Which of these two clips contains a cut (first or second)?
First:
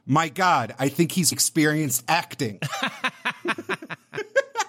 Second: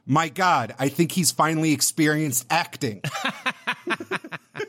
first